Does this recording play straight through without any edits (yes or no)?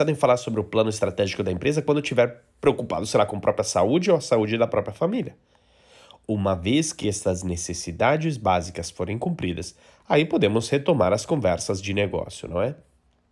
yes